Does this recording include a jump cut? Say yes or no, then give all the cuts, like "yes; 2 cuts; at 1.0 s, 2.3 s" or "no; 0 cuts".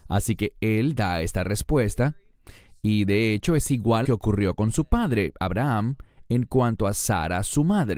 yes; 1 cut; at 4.0 s